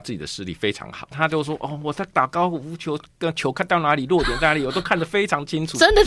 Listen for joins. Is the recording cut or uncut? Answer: cut